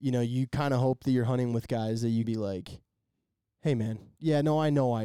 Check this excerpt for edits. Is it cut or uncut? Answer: cut